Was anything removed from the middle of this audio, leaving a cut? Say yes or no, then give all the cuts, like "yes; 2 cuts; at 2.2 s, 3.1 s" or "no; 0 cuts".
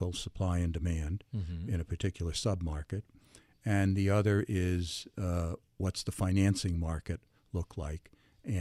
no; 0 cuts